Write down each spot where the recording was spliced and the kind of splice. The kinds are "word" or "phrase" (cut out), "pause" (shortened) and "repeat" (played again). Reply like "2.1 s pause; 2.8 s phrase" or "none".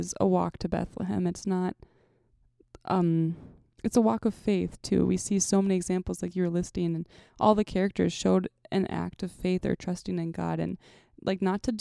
none